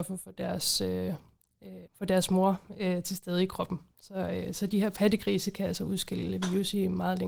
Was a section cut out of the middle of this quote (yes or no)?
yes